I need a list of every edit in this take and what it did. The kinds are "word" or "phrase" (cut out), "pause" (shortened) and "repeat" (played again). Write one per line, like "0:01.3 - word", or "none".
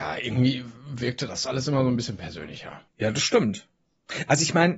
0:01.5 - word
0:02.9 - pause